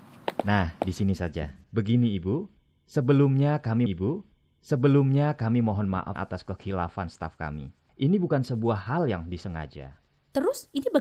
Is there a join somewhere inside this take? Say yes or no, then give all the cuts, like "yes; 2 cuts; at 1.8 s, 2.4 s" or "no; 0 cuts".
yes; 4 cuts; at 1.6 s, 3.9 s, 6.2 s, 7.9 s